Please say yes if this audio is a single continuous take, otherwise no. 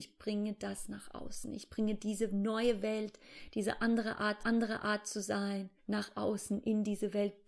no